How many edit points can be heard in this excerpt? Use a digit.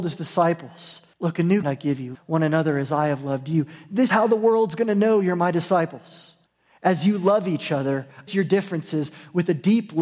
6